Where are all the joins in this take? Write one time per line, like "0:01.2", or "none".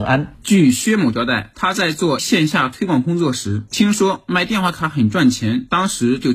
0:02.2